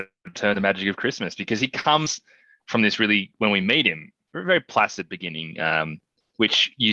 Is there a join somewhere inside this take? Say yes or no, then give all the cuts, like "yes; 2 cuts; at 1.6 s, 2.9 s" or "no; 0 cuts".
no; 0 cuts